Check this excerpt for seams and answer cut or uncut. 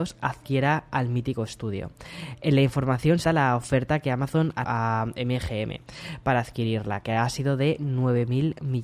cut